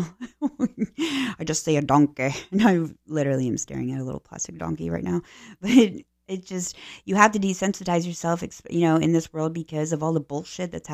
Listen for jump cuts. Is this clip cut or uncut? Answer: uncut